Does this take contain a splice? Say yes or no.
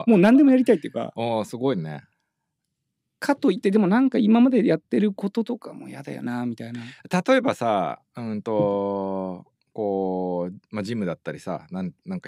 no